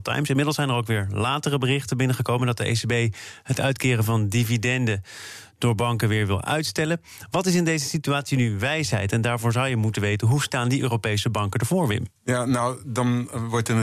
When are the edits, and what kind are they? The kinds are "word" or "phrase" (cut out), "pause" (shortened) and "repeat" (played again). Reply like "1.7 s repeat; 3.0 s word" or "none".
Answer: 12.2 s pause